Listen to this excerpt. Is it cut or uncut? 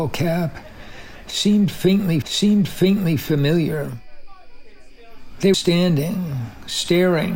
cut